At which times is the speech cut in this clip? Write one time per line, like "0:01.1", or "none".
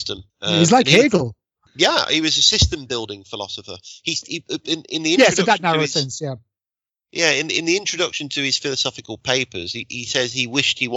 none